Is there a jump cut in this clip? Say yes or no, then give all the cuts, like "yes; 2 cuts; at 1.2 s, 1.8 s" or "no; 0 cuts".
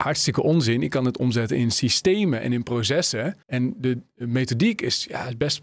yes; 1 cut; at 3.4 s